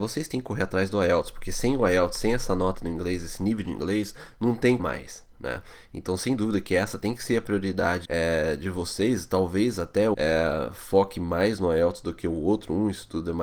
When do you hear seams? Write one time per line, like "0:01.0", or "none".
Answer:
0:04.8
0:08.0
0:10.1